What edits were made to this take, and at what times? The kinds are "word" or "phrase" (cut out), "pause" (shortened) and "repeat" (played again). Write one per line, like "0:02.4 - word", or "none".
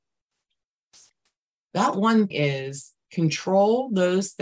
0:02.3 - word